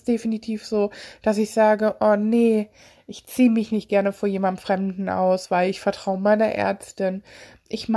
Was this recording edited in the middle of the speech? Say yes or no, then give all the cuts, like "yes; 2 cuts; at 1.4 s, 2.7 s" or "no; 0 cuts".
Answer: no; 0 cuts